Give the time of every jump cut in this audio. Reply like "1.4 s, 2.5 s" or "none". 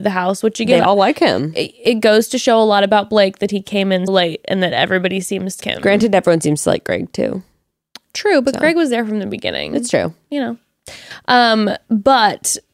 4.1 s, 5.6 s